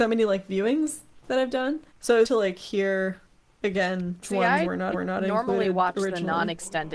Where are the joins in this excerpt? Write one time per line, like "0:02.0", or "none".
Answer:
0:01.9
0:02.2
0:04.2
0:04.9